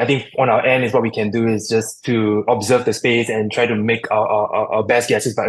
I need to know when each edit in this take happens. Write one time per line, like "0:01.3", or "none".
none

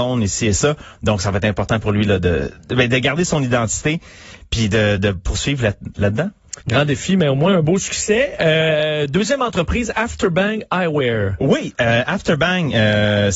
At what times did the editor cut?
0:05.0
0:06.6

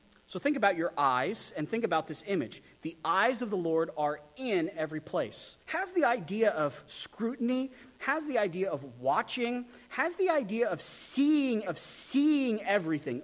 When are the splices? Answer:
0:05.6
0:11.7

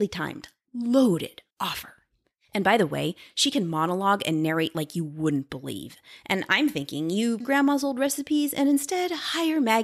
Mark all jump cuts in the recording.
0:01.5
0:07.4

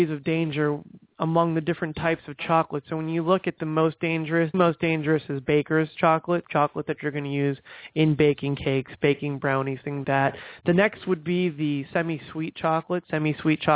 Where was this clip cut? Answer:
0:04.5
0:06.4
0:10.0

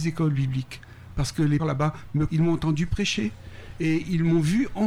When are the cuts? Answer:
0:01.6
0:02.3

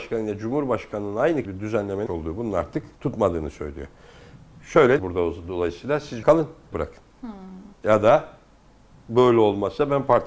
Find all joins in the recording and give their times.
0:01.5
0:02.1
0:02.9
0:05.0
0:06.2
0:06.7
0:07.7

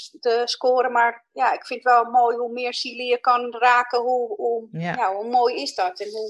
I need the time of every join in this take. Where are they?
none

